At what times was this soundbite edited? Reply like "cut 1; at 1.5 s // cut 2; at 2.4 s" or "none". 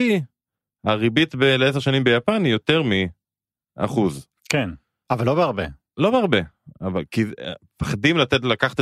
none